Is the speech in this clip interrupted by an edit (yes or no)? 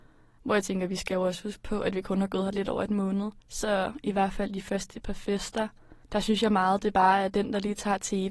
yes